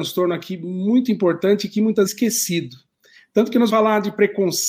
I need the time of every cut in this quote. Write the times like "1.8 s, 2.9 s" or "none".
2.1 s, 3.7 s